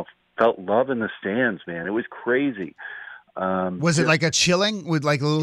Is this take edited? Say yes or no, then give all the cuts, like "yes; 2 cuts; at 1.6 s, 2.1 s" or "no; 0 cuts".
no; 0 cuts